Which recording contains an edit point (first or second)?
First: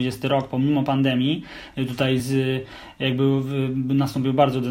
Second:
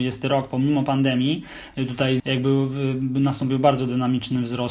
second